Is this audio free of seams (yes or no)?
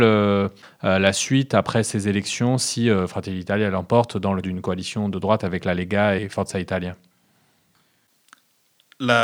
no